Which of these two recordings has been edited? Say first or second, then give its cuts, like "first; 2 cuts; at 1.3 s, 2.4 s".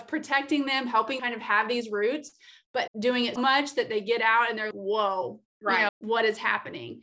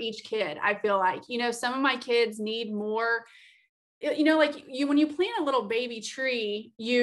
first; 5 cuts; at 1.2 s, 2.9 s, 3.4 s, 4.7 s, 5.9 s